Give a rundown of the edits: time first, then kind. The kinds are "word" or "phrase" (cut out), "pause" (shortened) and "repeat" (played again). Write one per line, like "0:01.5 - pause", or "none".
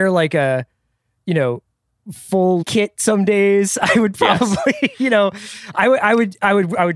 0:02.6 - phrase